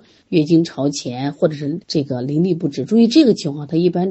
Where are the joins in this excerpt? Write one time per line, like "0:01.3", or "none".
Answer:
0:01.8